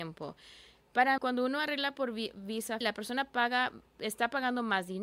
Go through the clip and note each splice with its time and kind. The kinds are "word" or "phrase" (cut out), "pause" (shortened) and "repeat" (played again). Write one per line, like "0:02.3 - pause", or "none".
0:01.2 - word
0:02.8 - word